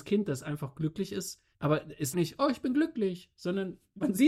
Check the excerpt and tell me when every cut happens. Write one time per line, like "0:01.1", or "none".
0:02.1